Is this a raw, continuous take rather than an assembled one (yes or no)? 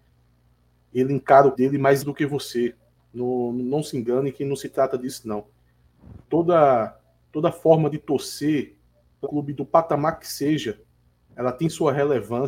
no